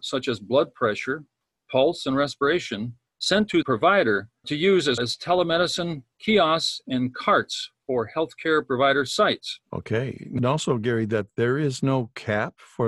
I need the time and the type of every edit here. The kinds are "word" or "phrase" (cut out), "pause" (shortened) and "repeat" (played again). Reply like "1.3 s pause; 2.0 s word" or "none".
3.1 s pause; 3.6 s word; 4.4 s word; 5.0 s word; 6.1 s pause; 9.6 s pause; 10.4 s phrase